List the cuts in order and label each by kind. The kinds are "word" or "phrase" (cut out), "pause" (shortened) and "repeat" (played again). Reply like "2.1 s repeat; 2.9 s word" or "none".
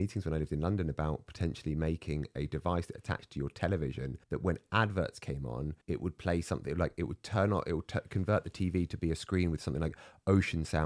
4.2 s pause; 5.8 s pause